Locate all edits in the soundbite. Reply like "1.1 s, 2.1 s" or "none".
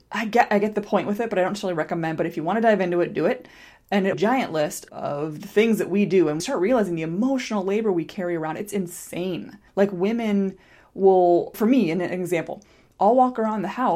4.1 s, 4.9 s, 6.4 s, 9.7 s, 11.5 s